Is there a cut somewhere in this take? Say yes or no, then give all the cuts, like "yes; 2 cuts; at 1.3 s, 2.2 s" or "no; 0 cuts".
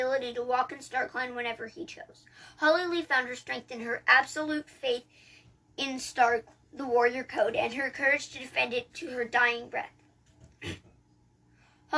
no; 0 cuts